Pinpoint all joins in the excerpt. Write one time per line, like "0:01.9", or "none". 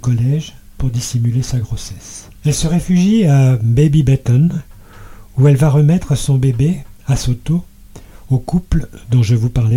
0:02.4
0:07.0

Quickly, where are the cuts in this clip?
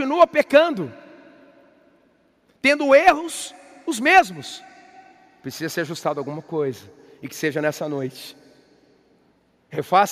none

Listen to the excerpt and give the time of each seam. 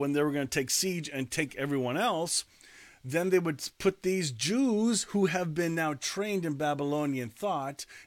none

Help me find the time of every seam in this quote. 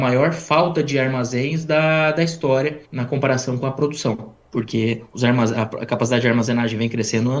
0:02.8
0:04.4

